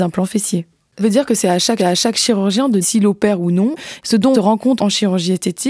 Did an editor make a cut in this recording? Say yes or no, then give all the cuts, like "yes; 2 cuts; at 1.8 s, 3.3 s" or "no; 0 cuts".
yes; 5 cuts; at 1.0 s, 1.8 s, 2.8 s, 4.3 s, 4.8 s